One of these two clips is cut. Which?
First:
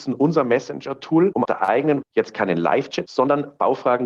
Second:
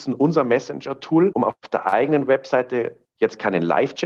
first; 3 cuts; at 1.4 s, 2.0 s, 3.1 s

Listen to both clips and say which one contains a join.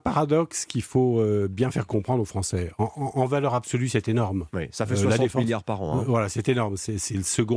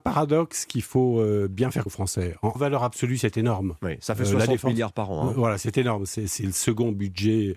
second; 2 cuts; at 1.9 s, 2.6 s

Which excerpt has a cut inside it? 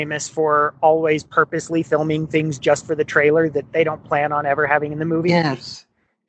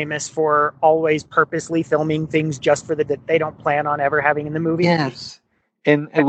second; 1 cut; at 3.1 s

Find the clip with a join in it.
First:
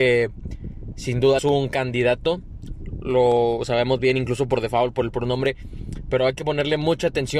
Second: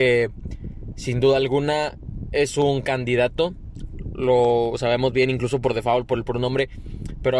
first; 1 cut; at 1.4 s

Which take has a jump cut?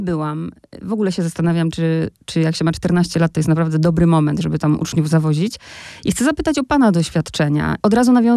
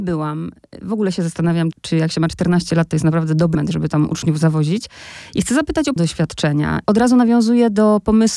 second; 3 cuts; at 1.7 s, 3.6 s, 6.0 s

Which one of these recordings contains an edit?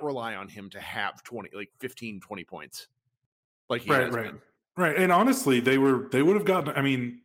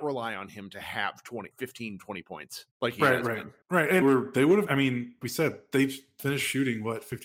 second; 7 cuts; at 1.5 s, 2.7 s, 3.6 s, 4.0 s, 4.7 s, 5.2 s, 6.2 s

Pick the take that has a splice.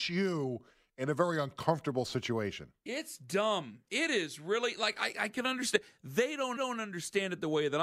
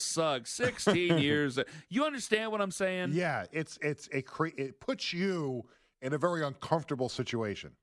first; 1 cut; at 6.6 s

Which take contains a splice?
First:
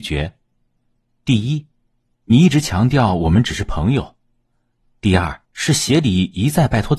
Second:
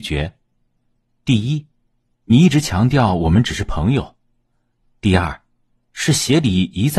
first; 1 cut; at 5.4 s

